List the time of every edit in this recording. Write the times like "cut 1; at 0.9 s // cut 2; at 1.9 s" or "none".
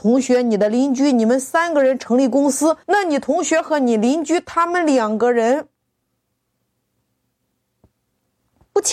cut 1; at 2.8 s